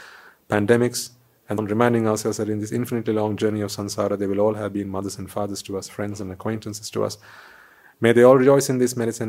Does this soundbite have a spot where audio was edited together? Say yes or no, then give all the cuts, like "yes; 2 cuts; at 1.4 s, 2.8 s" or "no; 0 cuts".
yes; 1 cut; at 1.6 s